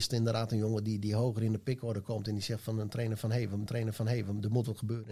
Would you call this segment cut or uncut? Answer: cut